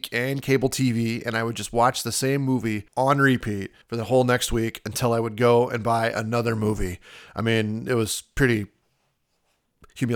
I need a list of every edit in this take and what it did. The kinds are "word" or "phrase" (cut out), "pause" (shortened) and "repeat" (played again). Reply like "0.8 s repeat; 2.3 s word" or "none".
2.9 s pause; 3.8 s pause